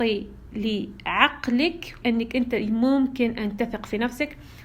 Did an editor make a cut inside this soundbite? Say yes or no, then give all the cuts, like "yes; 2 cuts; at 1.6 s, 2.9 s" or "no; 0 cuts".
yes; 1 cut; at 2.0 s